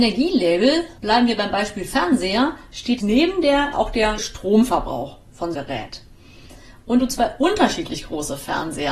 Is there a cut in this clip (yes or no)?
yes